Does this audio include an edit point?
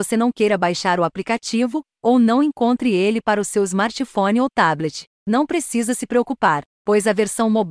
no; 0 cuts

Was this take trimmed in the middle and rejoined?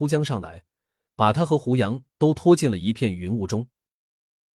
no; 0 cuts

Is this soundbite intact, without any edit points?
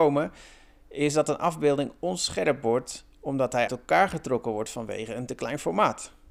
no; 1 cut; at 3.7 s

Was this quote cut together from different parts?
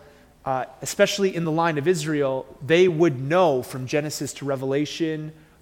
no; 0 cuts

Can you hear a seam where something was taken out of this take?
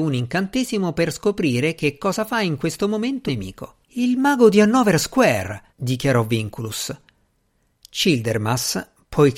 yes; 3 cuts; at 3.3 s, 3.8 s, 5.7 s

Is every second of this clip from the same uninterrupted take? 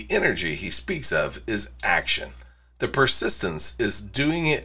yes; 0 cuts

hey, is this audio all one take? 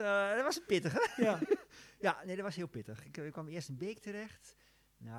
yes; 0 cuts

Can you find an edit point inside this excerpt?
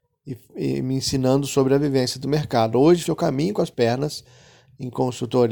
yes; 2 cuts; at 3.0 s, 3.7 s

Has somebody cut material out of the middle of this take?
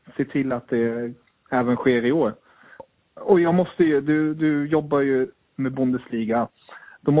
no; 0 cuts

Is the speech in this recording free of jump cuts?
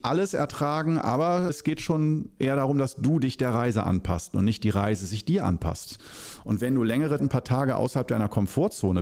no; 2 cuts; at 1.5 s, 7.2 s

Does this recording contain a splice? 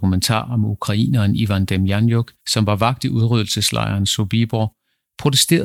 yes; 1 cut; at 2.4 s

